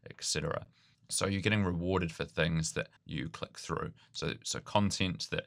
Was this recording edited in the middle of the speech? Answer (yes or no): yes